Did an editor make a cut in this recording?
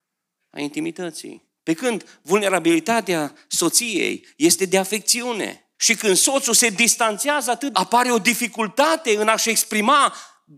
yes; 3 cuts; at 1.6 s, 5.7 s, 7.7 s

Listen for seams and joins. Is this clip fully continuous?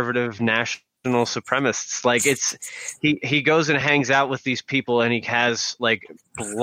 yes; 0 cuts

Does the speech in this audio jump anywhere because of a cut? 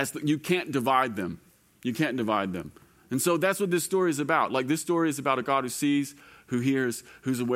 no; 0 cuts

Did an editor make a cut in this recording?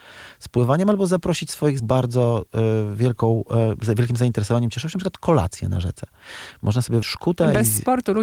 yes; 2 cuts; at 1.8 s, 7.0 s

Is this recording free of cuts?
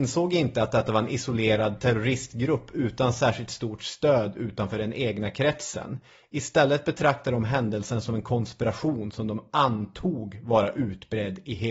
yes; 0 cuts

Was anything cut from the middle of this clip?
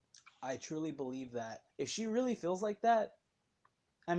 yes; 1 cut; at 1.7 s

